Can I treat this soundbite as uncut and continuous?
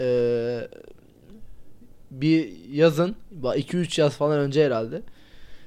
yes; 0 cuts

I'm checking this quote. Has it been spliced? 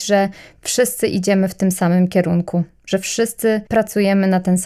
yes; 1 cut; at 3.7 s

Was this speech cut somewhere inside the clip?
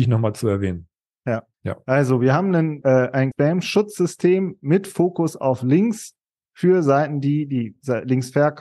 yes; 3 cuts; at 1.5 s, 2.8 s, 3.3 s

